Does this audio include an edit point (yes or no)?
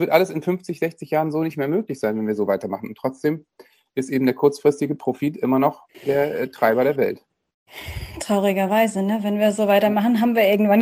yes